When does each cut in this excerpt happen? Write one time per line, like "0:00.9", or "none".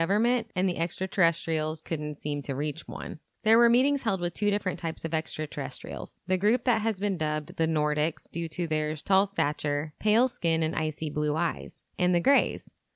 0:01.8
0:11.9